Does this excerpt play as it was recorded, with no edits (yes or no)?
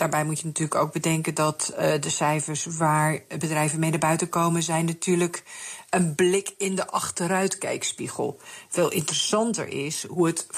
yes